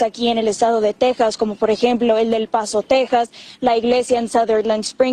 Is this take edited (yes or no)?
no